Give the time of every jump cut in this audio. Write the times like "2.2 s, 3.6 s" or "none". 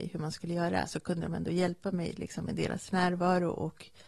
none